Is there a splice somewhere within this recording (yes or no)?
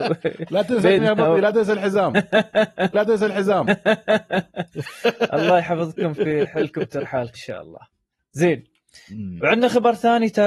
yes